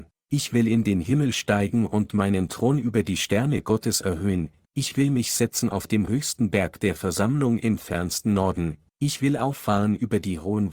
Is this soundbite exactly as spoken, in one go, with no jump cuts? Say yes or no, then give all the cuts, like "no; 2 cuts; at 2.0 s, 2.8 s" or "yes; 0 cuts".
yes; 0 cuts